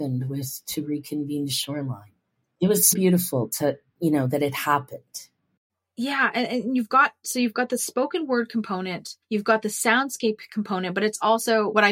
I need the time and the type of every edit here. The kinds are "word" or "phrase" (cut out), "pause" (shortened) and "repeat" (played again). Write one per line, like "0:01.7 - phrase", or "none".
0:02.9 - word
0:09.2 - pause